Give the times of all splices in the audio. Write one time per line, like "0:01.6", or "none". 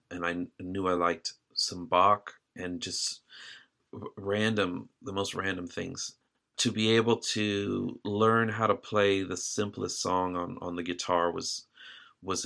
none